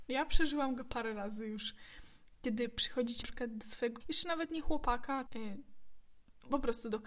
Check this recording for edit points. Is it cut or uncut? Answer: cut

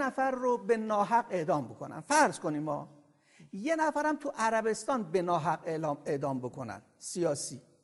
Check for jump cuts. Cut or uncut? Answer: uncut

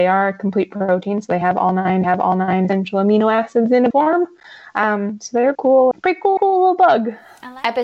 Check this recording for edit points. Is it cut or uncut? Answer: cut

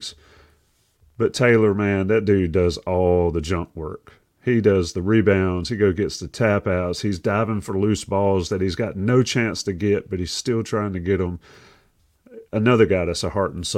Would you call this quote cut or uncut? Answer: cut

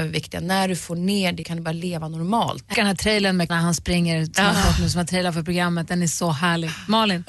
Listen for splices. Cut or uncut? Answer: cut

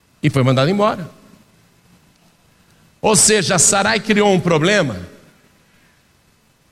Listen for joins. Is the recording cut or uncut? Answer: uncut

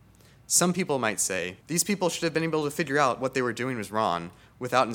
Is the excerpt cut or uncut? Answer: cut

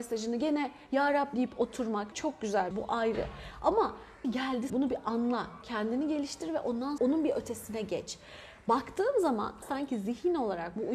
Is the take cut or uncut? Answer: cut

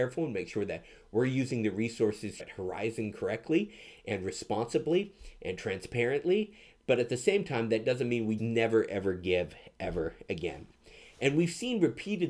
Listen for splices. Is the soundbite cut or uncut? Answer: cut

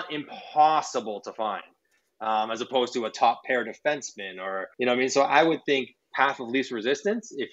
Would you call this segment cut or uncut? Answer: cut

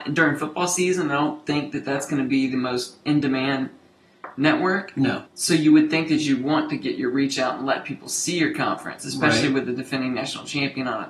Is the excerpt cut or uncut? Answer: cut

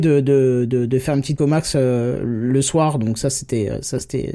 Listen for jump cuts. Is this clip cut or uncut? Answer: cut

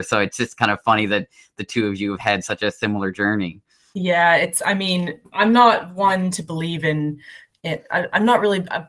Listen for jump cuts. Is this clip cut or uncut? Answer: uncut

